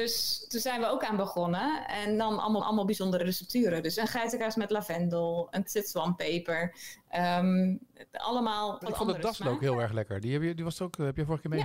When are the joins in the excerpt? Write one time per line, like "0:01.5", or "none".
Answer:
0:02.6
0:05.7
0:08.8